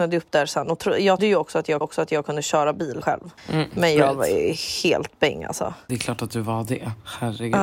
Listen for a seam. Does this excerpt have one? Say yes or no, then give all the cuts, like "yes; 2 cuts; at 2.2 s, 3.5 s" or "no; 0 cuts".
yes; 5 cuts; at 1.2 s, 1.8 s, 3.0 s, 3.4 s, 5.9 s